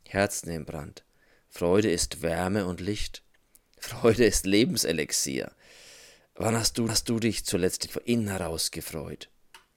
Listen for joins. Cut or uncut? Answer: cut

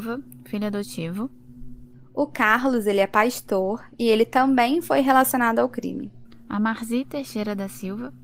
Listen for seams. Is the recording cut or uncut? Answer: uncut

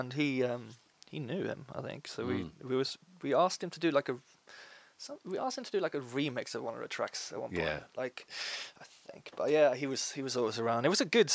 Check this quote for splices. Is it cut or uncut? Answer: uncut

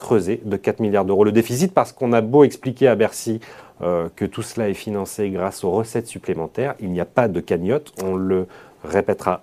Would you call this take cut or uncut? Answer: uncut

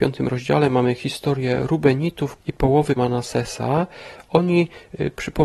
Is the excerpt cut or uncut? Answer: cut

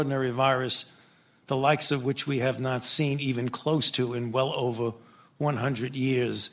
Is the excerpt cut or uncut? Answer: uncut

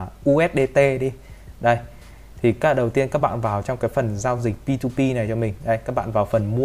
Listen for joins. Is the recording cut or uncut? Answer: uncut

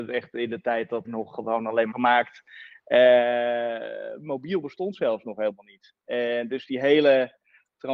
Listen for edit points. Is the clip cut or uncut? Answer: cut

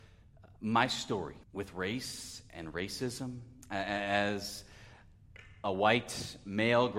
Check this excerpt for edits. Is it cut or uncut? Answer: cut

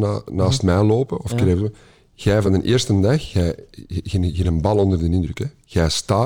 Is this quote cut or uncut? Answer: uncut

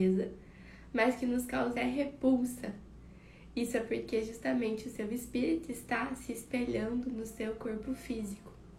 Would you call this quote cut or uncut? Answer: cut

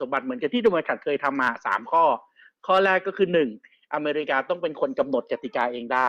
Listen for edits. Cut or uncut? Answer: uncut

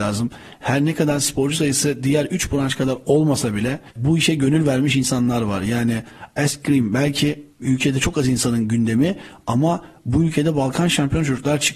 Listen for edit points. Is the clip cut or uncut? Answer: cut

